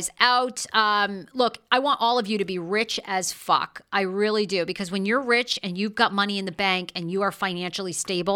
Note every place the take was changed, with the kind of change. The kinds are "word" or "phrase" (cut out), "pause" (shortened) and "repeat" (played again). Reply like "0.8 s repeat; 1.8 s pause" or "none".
none